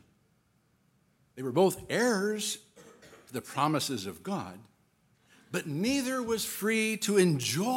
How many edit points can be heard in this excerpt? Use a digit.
0